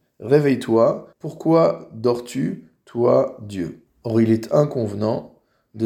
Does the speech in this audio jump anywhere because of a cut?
yes; 2 cuts; at 1.1 s, 3.9 s

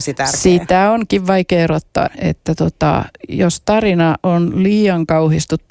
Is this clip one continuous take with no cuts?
no; 1 cut; at 2.1 s

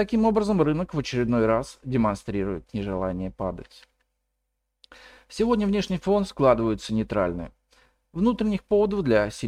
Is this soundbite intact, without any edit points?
yes; 0 cuts

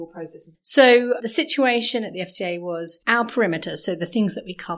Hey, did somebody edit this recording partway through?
no; 0 cuts

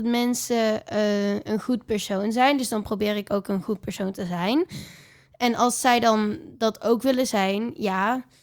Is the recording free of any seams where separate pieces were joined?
yes; 0 cuts

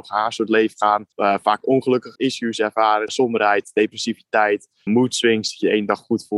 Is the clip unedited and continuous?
no; 4 cuts; at 1.1 s, 2.2 s, 3.1 s, 4.9 s

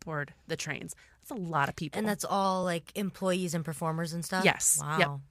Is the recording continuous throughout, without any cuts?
yes; 0 cuts

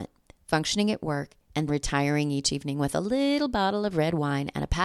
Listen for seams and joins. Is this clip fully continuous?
no; 1 cut; at 1.7 s

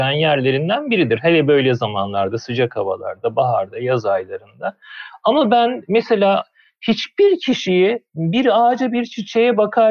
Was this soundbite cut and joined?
no; 0 cuts

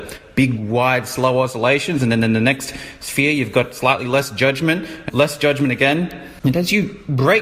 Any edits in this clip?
yes; 1 cut; at 5.1 s

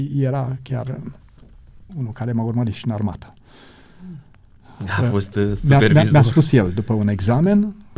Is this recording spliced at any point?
yes; 1 cut; at 1.9 s

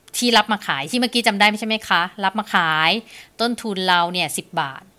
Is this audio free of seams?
yes; 0 cuts

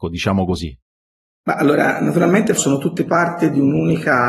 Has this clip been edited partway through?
yes; 1 cut; at 2.6 s

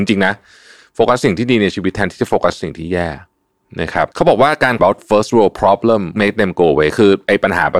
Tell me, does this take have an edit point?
yes; 3 cuts; at 4.1 s, 4.8 s, 6.2 s

